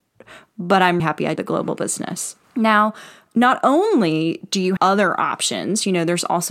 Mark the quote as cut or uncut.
cut